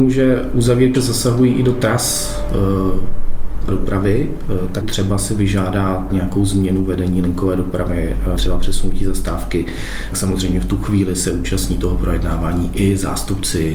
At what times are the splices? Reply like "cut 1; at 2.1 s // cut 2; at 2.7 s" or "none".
cut 1; at 0.9 s // cut 2; at 3.7 s // cut 3; at 4.8 s // cut 4; at 6.1 s // cut 5; at 8.4 s // cut 6; at 10.1 s

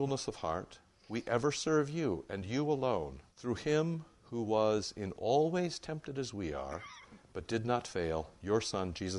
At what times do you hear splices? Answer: cut 1; at 3.3 s

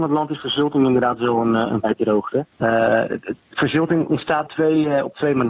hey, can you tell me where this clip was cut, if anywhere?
cut 1; at 1.8 s // cut 2; at 2.5 s // cut 3; at 4.5 s

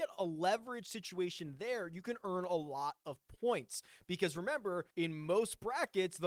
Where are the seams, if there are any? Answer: cut 1; at 4.9 s

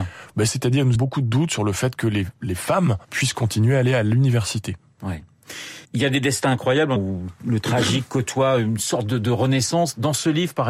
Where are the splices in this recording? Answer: cut 1; at 0.9 s // cut 2; at 3.0 s // cut 3; at 5.8 s // cut 4; at 7.0 s

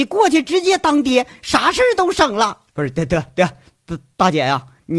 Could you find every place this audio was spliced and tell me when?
cut 1; at 2.7 s

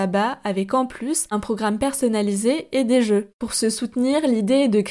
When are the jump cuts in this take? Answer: none

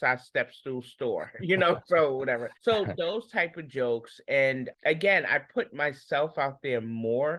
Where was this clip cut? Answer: cut 1; at 2.6 s // cut 2; at 4.7 s

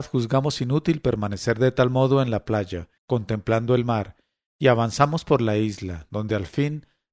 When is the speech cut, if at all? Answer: cut 1; at 3.0 s

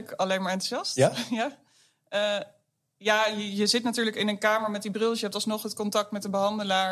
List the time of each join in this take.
none

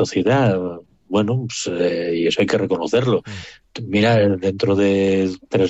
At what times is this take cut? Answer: none

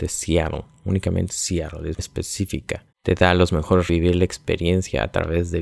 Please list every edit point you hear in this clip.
cut 1; at 1.3 s // cut 2; at 2.0 s // cut 3; at 2.9 s // cut 4; at 3.9 s

